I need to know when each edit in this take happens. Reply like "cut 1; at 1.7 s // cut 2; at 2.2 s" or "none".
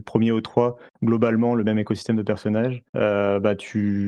cut 1; at 2.9 s